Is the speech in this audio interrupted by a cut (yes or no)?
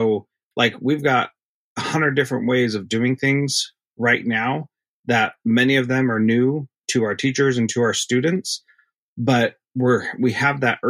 no